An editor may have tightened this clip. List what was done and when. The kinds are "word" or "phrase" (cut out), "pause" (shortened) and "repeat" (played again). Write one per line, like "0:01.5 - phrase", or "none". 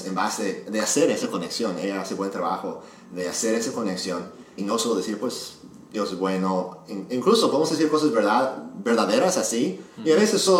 0:04.6 - word